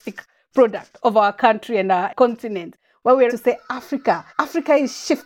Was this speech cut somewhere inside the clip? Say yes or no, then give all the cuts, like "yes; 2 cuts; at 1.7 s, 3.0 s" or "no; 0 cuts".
yes; 2 cuts; at 3.3 s, 4.3 s